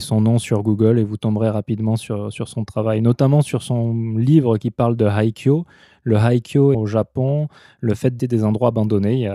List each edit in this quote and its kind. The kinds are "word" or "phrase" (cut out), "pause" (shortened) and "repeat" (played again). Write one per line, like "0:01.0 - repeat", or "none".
0:06.7 - word
0:08.2 - word